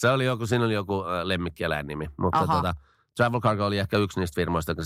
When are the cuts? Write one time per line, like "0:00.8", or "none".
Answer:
none